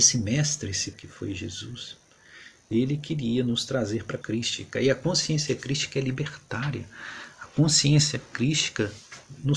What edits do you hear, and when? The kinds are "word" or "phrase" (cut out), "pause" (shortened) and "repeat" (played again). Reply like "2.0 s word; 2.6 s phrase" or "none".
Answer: 0.9 s word; 4.2 s word

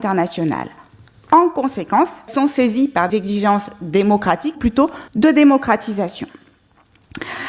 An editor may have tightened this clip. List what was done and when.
2.3 s word; 3.1 s word; 4.5 s word; 5.1 s pause

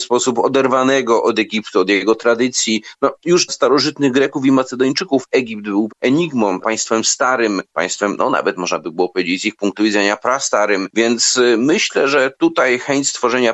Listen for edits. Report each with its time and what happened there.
3.5 s word; 5.9 s phrase; 6.6 s word; 7.7 s pause

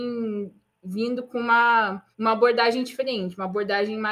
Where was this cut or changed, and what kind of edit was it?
2.1 s pause

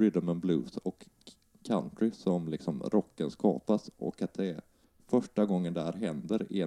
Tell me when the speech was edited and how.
none

